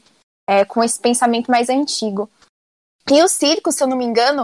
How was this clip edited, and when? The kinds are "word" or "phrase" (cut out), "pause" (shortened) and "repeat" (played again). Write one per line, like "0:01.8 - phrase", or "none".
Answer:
none